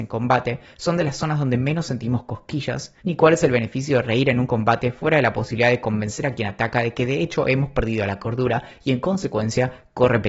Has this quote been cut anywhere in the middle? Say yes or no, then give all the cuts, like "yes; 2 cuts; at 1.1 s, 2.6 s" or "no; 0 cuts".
yes; 1 cut; at 3.0 s